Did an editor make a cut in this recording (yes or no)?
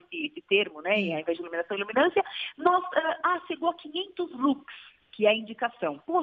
no